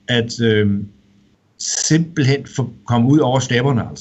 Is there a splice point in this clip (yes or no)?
no